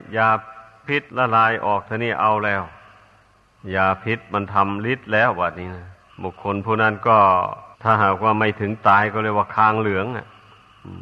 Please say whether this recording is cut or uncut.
cut